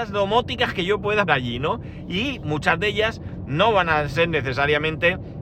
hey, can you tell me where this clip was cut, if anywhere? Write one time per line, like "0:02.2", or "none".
0:01.3